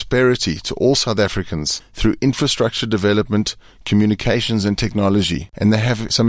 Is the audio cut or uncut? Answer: uncut